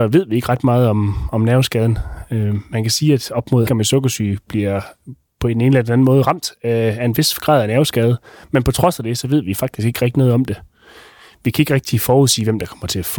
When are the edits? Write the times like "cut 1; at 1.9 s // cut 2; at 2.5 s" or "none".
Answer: cut 1; at 3.7 s